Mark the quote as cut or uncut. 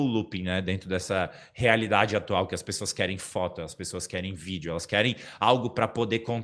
uncut